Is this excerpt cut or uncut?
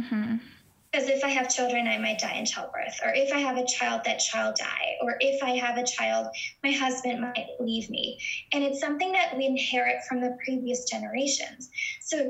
cut